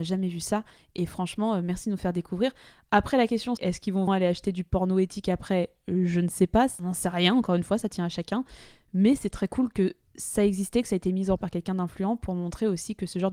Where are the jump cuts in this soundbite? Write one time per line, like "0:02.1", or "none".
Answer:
0:03.6
0:04.1
0:11.4